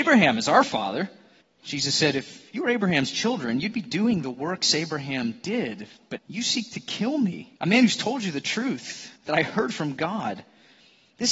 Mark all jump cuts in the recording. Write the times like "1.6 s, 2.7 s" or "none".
1.4 s, 6.2 s, 7.6 s, 9.2 s

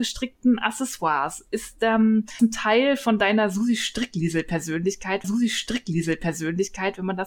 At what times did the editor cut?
2.4 s, 5.2 s

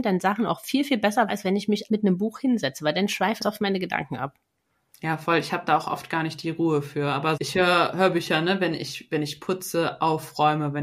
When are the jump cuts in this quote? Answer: 1.3 s, 1.9 s, 3.4 s, 7.4 s

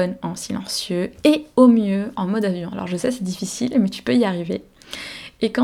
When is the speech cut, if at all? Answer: none

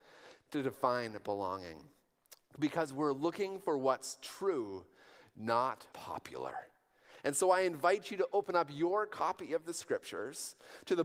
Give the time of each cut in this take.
5.9 s

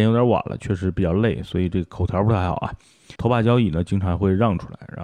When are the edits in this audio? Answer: 3.2 s

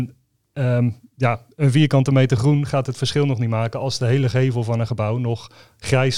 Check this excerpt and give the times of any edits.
none

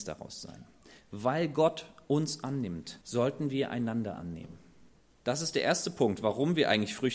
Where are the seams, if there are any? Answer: 3.0 s, 5.0 s

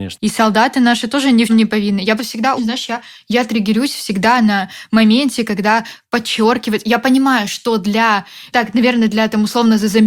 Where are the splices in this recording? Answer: 1.5 s, 2.2 s, 2.6 s, 8.5 s

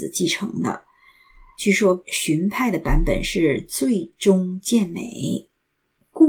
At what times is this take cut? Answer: none

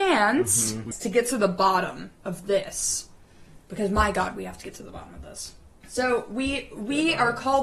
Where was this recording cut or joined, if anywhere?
2.2 s

